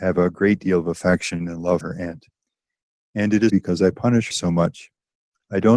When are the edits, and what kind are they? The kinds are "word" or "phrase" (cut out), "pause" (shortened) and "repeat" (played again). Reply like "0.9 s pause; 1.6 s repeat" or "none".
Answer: 1.8 s word; 3.5 s word; 4.3 s word